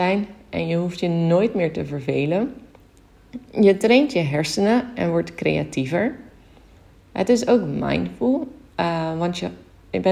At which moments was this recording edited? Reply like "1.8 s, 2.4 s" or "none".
none